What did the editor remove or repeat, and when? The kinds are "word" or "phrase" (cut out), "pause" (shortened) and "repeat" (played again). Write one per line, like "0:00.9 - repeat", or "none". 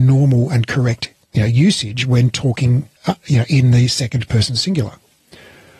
0:01.2 - pause
0:03.0 - pause